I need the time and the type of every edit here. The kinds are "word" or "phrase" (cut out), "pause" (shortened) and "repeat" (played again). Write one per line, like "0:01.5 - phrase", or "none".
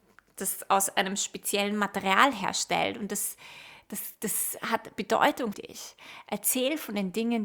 0:05.5 - word